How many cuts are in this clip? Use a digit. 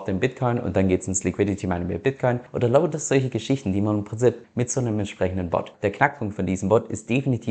2